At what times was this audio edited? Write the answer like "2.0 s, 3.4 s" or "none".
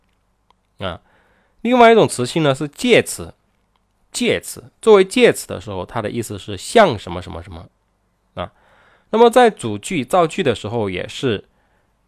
none